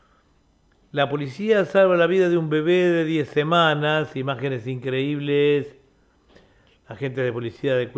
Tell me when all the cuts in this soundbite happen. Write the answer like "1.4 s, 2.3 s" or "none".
none

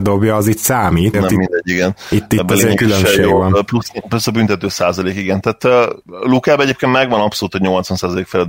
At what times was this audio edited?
1.1 s

